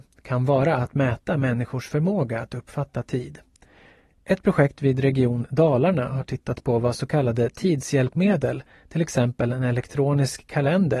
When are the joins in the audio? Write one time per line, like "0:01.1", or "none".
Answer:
none

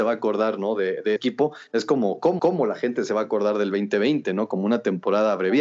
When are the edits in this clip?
0:01.2
0:02.4

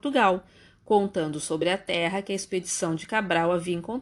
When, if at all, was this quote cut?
none

